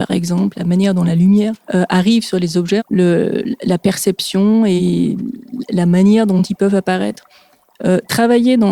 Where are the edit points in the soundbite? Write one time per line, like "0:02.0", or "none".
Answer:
0:01.6
0:02.8